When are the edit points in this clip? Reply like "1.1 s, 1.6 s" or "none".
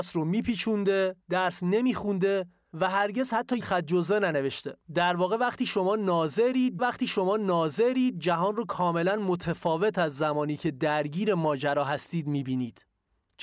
1.2 s, 3.6 s, 4.8 s, 6.8 s